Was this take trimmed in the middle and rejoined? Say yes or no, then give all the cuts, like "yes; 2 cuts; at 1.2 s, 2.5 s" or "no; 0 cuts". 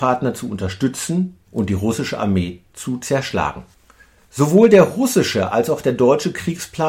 yes; 1 cut; at 1.5 s